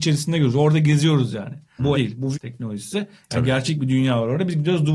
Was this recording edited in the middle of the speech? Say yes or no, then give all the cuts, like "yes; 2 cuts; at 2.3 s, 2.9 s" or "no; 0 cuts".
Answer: yes; 2 cuts; at 1.9 s, 2.3 s